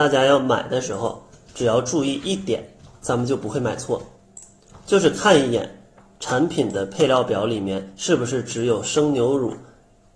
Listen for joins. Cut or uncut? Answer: uncut